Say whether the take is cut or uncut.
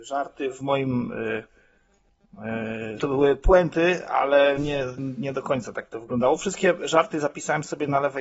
cut